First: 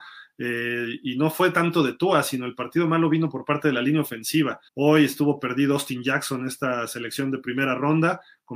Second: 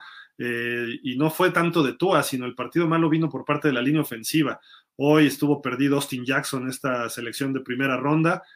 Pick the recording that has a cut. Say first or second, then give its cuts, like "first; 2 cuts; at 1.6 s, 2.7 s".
first; 1 cut; at 4.7 s